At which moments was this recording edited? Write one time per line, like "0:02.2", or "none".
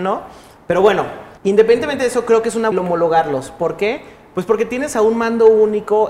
0:01.4
0:02.7